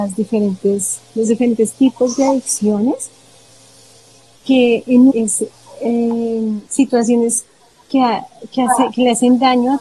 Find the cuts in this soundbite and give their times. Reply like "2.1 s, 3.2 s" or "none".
5.1 s, 6.7 s